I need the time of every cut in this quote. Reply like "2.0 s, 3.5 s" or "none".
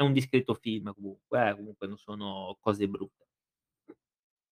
none